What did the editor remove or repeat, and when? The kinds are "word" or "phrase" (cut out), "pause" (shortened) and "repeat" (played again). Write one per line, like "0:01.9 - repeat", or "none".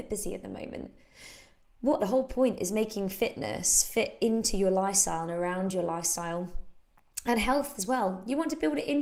0:02.0 - word